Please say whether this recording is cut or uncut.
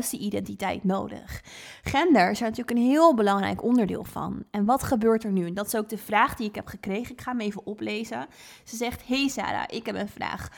uncut